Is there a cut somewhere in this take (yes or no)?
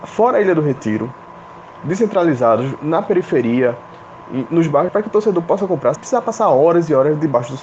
yes